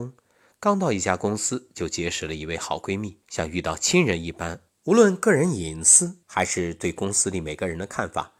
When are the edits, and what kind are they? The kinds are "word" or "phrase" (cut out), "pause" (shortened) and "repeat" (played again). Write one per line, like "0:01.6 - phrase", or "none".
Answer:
0:03.2 - pause
0:04.7 - phrase
0:06.2 - pause